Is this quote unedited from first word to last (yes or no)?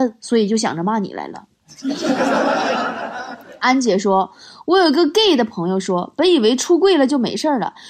yes